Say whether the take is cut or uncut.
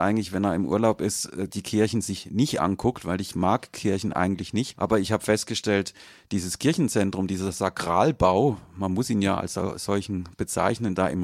uncut